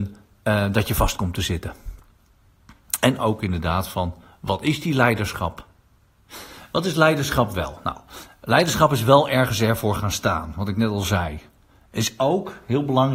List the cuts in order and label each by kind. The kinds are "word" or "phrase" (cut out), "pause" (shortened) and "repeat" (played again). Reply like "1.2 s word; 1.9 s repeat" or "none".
none